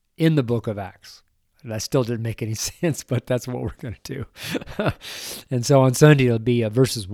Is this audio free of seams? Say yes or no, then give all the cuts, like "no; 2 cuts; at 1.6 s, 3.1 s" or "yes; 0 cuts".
yes; 0 cuts